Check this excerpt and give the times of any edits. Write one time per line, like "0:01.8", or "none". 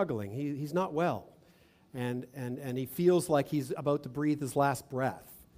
none